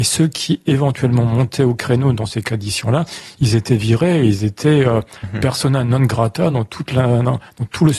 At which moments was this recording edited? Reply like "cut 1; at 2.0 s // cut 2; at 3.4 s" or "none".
none